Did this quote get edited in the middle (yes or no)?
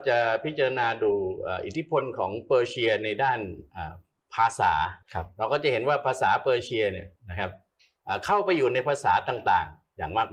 yes